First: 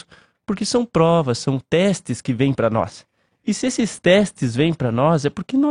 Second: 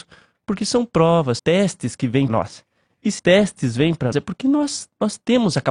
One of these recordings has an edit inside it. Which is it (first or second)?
second